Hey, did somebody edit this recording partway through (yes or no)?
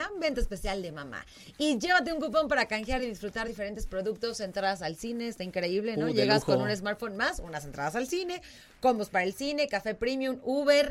no